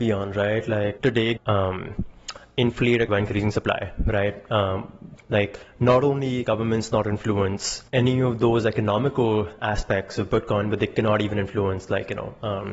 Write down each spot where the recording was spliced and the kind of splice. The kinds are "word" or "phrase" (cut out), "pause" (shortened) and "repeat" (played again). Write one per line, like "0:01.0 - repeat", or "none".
0:01.0 - word
0:01.4 - phrase
0:03.1 - word
0:05.2 - word
0:06.4 - word
0:07.9 - pause